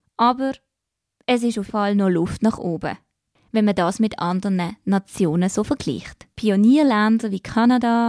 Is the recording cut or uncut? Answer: cut